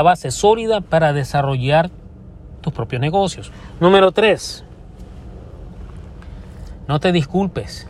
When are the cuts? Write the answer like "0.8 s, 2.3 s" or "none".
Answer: 2.6 s